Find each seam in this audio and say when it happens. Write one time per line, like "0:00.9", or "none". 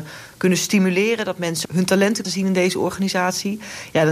0:01.6
0:02.2